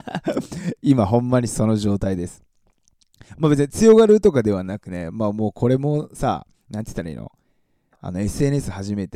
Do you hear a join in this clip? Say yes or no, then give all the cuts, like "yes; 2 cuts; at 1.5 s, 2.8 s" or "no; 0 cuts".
yes; 1 cut; at 3.3 s